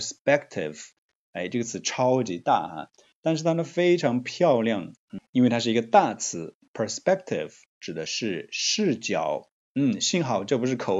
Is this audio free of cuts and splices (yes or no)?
yes